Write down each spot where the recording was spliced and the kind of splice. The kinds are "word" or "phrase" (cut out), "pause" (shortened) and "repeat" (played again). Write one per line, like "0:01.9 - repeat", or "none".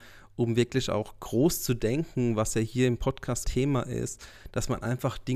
0:03.4 - word